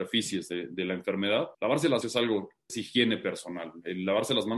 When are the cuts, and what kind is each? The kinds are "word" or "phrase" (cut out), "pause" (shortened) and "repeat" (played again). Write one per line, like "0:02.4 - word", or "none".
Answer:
0:01.5 - pause
0:02.0 - word
0:02.7 - word